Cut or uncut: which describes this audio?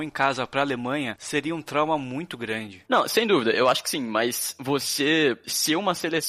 uncut